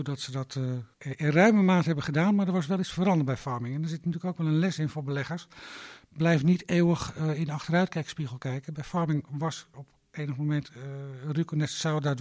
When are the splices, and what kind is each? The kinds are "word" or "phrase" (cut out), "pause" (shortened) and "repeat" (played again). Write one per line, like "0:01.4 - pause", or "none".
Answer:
0:00.9 - pause
0:09.7 - word

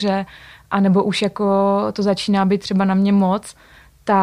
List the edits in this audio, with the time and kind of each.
none

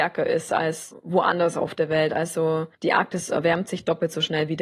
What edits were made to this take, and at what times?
0:02.7 - pause

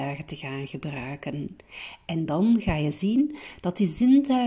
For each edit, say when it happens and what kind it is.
none

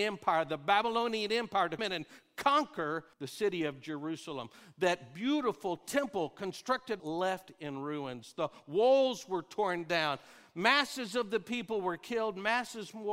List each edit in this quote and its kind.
0:01.8 - word
0:03.1 - pause
0:07.0 - phrase

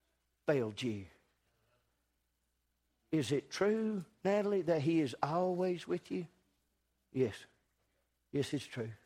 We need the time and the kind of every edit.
none

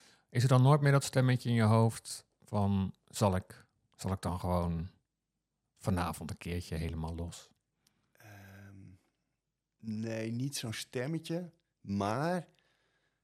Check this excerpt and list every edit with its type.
none

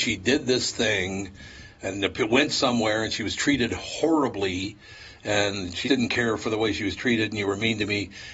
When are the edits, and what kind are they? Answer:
0:05.8 - word

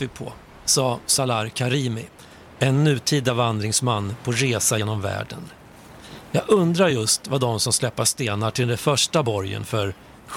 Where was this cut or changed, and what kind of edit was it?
none

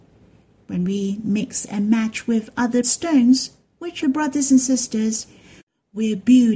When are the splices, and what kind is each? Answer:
0:02.8 - word
0:04.0 - word

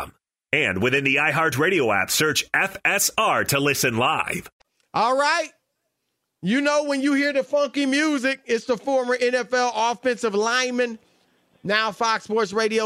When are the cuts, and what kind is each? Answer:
none

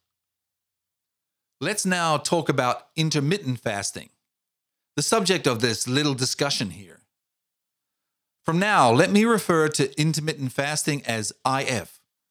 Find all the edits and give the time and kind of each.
none

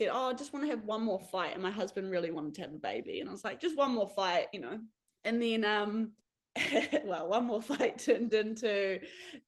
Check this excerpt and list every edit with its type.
0:05.1 - pause
0:06.2 - pause

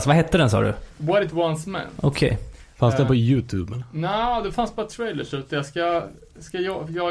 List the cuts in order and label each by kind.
none

